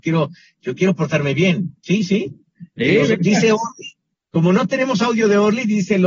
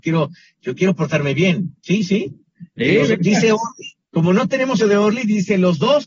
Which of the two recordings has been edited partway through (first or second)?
second